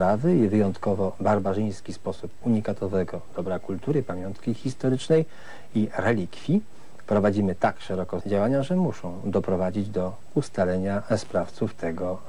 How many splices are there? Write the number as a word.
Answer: two